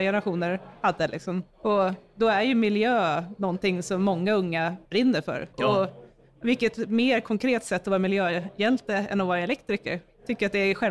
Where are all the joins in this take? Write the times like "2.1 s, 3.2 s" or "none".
1.5 s, 4.8 s, 5.5 s